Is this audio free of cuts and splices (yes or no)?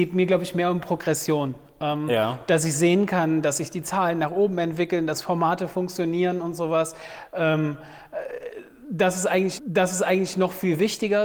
no